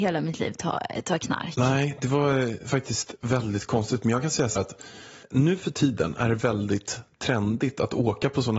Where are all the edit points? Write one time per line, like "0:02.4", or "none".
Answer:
0:03.2
0:04.6
0:05.2